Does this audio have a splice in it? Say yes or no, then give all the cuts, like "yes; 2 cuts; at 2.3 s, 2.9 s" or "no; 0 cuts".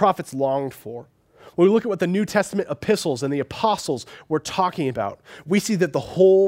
no; 0 cuts